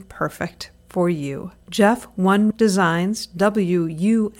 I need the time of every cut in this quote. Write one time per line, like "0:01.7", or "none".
0:01.6
0:02.5